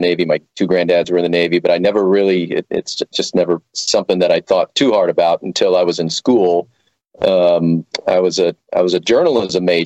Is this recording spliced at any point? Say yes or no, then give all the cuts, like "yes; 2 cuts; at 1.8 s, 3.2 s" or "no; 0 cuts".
no; 0 cuts